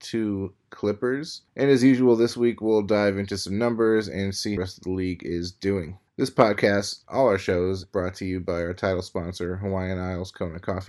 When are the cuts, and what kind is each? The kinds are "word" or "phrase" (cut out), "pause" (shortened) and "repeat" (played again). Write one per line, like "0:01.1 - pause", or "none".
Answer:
0:01.5 - pause
0:04.6 - phrase
0:06.1 - pause
0:07.0 - word
0:07.8 - word